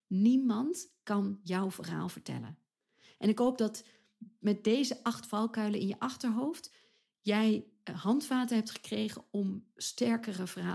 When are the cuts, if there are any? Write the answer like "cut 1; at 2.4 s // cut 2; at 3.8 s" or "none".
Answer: none